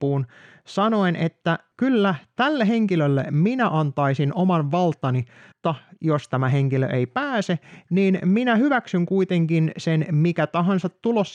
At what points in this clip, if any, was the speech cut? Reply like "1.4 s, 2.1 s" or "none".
5.5 s